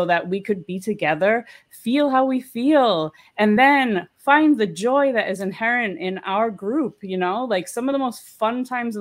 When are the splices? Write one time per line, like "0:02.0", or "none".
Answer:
none